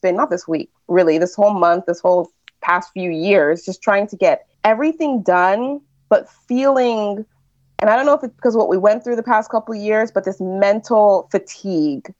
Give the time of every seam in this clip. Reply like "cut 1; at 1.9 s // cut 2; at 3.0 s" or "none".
cut 1; at 4.5 s